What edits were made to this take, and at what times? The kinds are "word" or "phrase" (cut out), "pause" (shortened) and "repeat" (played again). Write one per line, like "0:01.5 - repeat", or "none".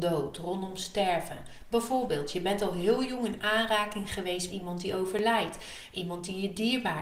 0:04.5 - word